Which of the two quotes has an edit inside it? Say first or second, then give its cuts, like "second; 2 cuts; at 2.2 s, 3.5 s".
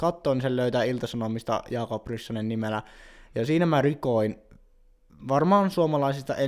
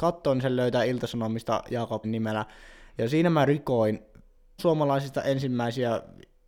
second; 2 cuts; at 2.0 s, 4.6 s